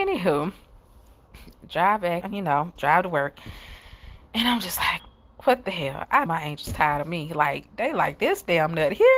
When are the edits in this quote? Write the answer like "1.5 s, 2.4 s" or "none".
1.6 s, 2.2 s, 2.8 s, 5.0 s, 6.3 s